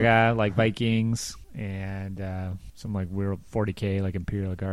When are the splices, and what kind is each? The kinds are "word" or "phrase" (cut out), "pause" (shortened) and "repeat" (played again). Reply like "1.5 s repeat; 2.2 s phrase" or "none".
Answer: none